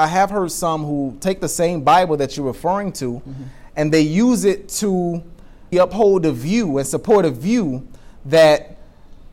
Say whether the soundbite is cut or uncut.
cut